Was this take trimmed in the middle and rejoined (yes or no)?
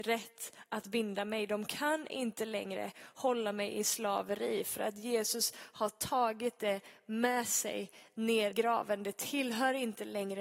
yes